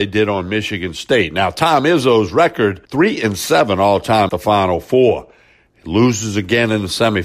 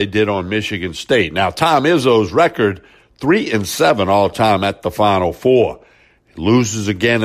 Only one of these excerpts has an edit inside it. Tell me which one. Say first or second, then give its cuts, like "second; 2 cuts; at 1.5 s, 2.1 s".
first; 2 cuts; at 2.8 s, 4.3 s